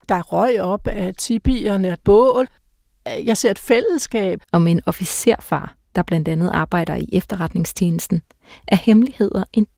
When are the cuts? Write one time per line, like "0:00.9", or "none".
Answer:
0:02.0
0:04.4

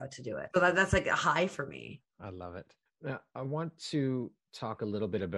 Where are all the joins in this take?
none

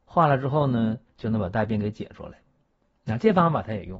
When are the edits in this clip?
0:01.1

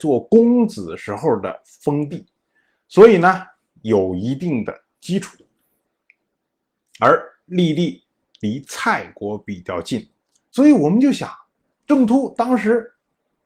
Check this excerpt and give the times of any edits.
none

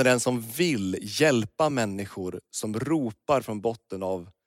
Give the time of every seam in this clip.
none

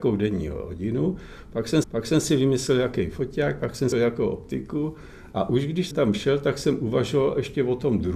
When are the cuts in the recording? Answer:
0:01.8
0:03.9
0:05.9

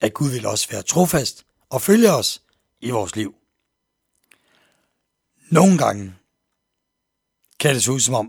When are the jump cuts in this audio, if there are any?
none

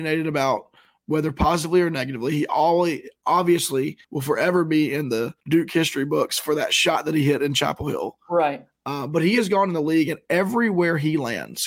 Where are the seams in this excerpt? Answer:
0:04.0
0:05.4

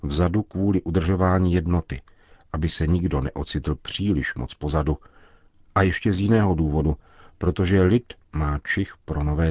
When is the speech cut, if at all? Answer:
none

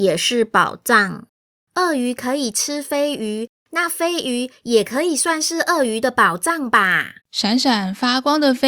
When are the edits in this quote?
0:07.2

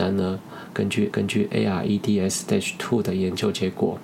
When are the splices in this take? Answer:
0:01.1

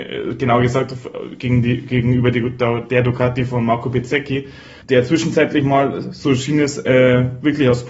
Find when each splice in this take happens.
0:04.8

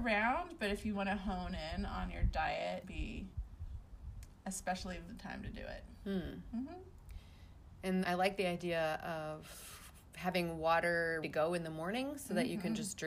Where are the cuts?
0:00.9
0:02.8
0:05.1
0:08.0
0:11.2

